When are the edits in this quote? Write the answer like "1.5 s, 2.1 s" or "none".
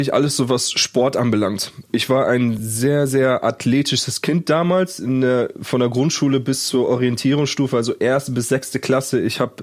none